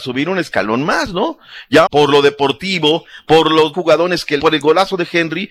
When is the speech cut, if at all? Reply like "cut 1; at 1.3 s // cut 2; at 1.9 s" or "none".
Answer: cut 1; at 1.9 s // cut 2; at 3.7 s // cut 3; at 4.4 s